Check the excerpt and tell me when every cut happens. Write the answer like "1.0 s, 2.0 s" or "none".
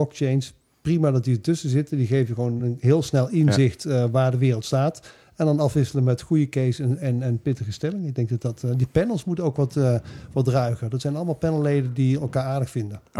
none